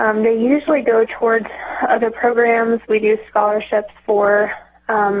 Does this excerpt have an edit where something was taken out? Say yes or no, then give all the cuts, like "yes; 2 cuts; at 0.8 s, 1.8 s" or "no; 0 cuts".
no; 0 cuts